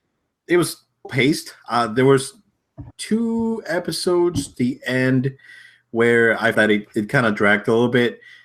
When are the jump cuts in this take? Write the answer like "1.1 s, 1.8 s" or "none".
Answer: 1.0 s, 2.9 s, 4.5 s, 6.5 s